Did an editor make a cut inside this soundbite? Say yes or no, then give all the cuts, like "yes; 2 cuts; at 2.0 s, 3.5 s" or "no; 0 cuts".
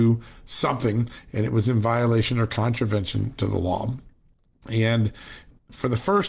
no; 0 cuts